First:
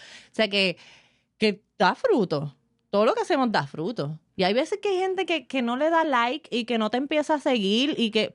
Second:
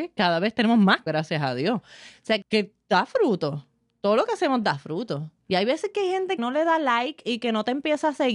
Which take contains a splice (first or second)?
second